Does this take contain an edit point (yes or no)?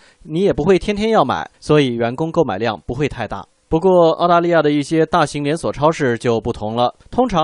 no